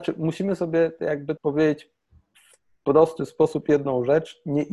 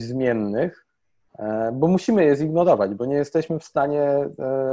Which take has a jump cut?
first; 1 cut; at 1.4 s

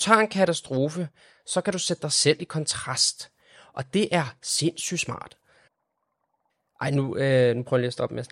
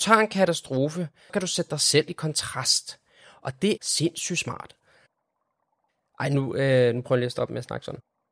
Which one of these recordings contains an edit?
second; 2 cuts; at 1.3 s, 3.8 s

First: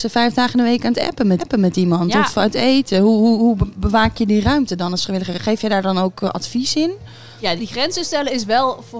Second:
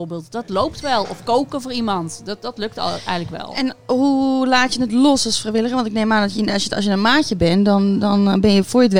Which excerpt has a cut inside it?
first; 2 cuts; at 1.4 s, 7.6 s

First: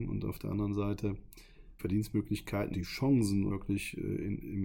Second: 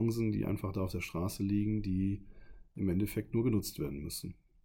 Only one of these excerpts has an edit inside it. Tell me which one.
first; 3 cuts; at 1.8 s, 2.7 s, 3.5 s

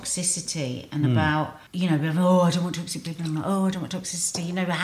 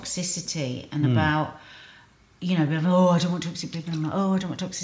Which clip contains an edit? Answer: first; 1 cut; at 1.7 s

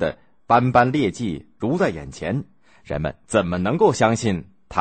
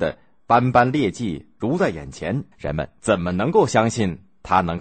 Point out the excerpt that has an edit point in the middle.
second; 1 cut; at 2.5 s

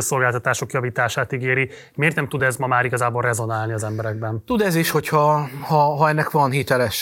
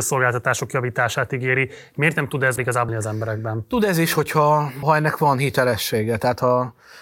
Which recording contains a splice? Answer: second; 3 cuts; at 2.6 s, 2.9 s, 4.8 s

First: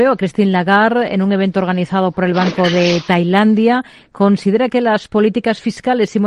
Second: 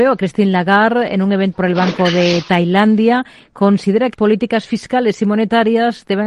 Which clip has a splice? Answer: second; 2 cuts; at 1.5 s, 4.1 s

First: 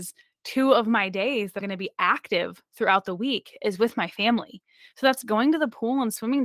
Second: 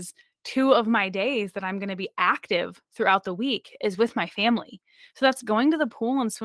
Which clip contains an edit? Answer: first; 1 cut; at 1.6 s

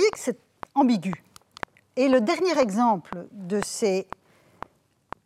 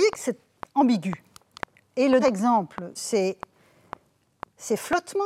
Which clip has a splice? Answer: second; 2 cuts; at 2.2 s, 3.0 s

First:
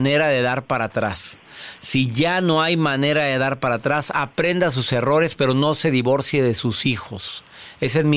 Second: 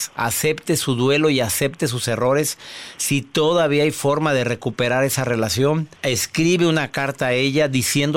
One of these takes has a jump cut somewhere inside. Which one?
second; 1 cut; at 6.0 s

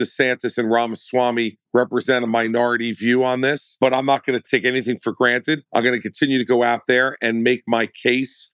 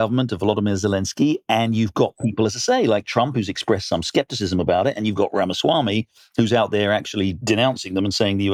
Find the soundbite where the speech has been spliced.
first; 2 cuts; at 1.7 s, 5.7 s

